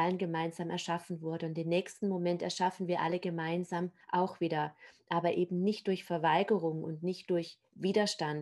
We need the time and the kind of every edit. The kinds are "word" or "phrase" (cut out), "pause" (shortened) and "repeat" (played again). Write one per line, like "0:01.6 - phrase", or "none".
0:04.0 - pause